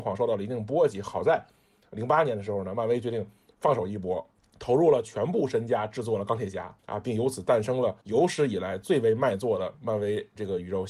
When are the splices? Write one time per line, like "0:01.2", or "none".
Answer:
0:06.8
0:08.0

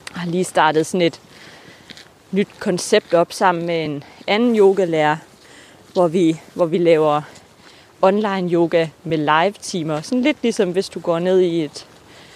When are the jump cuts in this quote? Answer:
none

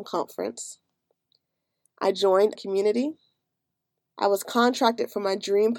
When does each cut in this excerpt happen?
0:02.5

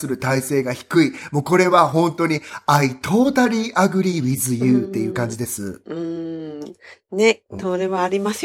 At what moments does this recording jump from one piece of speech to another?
none

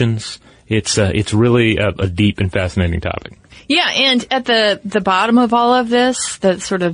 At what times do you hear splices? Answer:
none

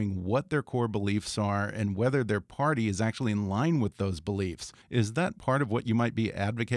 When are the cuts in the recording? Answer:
0:04.8

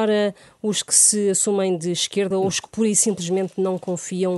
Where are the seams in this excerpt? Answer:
0:02.3

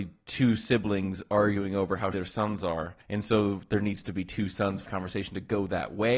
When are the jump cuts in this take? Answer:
0:02.1
0:03.0
0:04.9

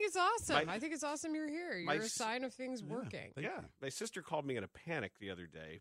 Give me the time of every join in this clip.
none

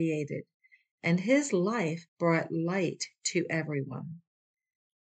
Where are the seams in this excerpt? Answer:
0:02.1

